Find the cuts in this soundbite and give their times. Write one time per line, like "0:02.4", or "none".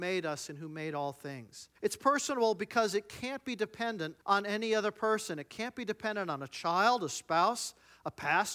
0:01.8
0:04.2